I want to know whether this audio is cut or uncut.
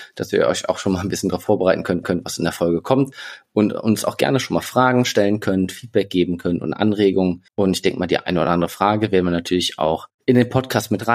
cut